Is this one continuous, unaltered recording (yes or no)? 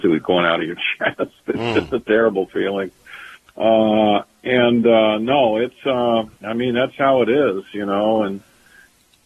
no